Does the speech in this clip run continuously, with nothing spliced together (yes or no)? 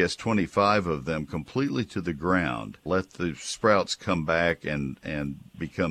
no